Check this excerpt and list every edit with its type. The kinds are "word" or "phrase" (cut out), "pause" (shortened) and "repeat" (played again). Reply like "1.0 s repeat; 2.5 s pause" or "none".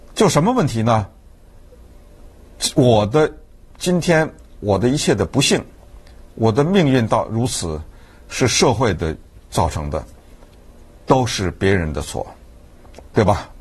none